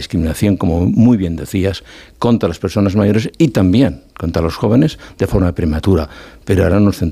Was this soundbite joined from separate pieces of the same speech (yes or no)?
no